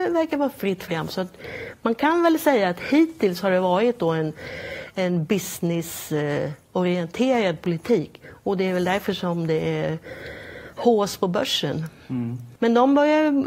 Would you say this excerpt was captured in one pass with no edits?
no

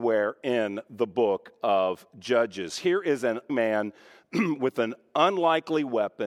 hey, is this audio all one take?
no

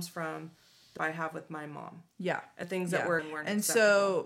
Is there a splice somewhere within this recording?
yes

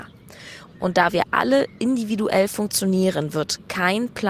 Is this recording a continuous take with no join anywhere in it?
yes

